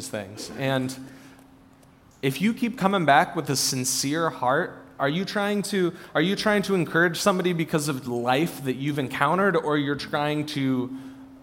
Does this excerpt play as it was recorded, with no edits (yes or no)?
yes